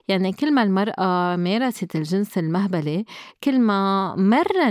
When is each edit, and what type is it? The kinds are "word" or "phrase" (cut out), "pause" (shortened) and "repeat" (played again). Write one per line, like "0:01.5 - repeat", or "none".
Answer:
none